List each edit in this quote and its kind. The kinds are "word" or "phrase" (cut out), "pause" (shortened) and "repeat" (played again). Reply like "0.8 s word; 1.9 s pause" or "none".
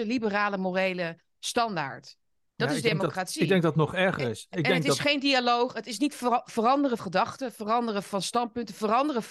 7.0 s word